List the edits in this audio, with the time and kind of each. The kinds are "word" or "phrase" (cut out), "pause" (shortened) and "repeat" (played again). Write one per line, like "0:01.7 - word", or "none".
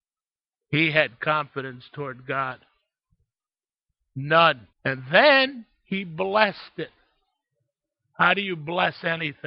0:04.7 - pause